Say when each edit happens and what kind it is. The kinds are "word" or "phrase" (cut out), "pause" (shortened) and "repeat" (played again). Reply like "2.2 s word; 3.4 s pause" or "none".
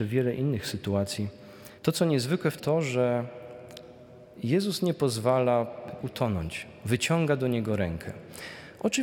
1.8 s pause; 2.6 s phrase; 6.0 s word